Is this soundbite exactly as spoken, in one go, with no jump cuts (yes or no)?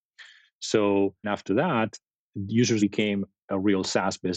no